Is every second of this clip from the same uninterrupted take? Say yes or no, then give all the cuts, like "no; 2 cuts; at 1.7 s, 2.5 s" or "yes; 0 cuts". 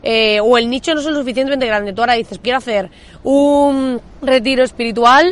no; 2 cuts; at 2.4 s, 4.1 s